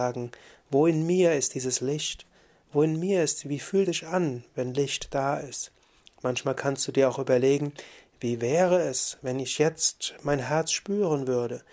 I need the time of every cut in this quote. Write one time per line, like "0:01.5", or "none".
0:03.9